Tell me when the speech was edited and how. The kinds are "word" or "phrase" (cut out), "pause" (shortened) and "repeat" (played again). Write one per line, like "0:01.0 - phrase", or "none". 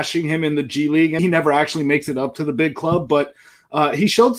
0:01.2 - word

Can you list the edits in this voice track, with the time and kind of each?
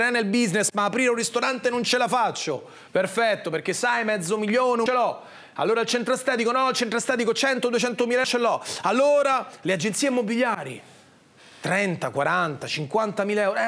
0:02.9 - pause
0:04.9 - phrase
0:08.2 - word

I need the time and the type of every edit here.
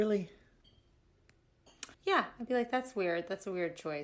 0:01.9 - pause

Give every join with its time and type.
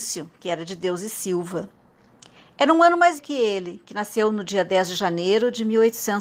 0:03.2 - word

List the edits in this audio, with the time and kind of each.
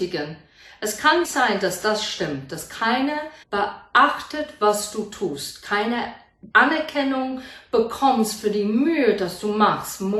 0:01.2 - word
0:03.4 - pause
0:06.5 - pause

